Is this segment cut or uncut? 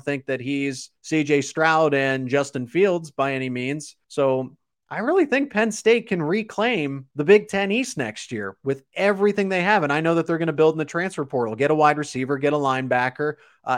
cut